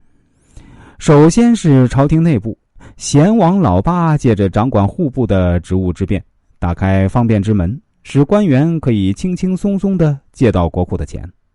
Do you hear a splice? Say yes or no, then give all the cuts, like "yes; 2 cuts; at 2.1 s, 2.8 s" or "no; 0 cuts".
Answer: no; 0 cuts